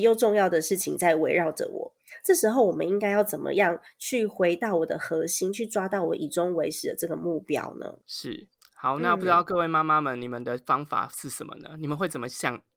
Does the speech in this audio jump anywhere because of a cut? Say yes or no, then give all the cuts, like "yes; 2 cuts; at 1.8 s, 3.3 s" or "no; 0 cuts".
yes; 1 cut; at 8.6 s